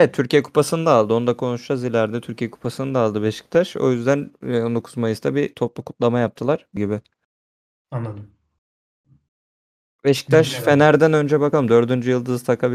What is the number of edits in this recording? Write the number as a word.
one